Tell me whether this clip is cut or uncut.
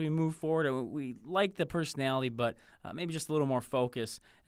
uncut